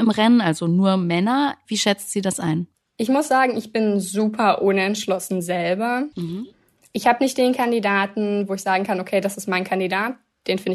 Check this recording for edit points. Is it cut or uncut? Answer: cut